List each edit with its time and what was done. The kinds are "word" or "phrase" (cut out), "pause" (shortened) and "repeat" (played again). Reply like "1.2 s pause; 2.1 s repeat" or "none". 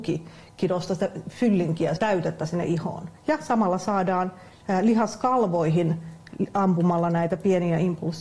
2.0 s word; 3.2 s pause